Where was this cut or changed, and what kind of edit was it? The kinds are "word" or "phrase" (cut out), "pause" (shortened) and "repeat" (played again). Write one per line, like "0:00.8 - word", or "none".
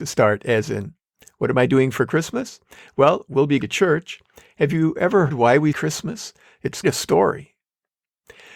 0:03.6 - word
0:05.3 - word
0:05.7 - word
0:06.8 - word